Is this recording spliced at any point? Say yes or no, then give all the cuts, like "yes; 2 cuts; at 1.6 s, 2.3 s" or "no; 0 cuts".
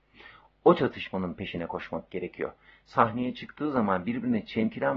no; 0 cuts